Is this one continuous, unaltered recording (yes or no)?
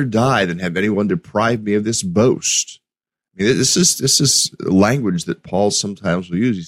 yes